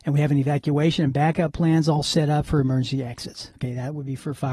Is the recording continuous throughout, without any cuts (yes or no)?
yes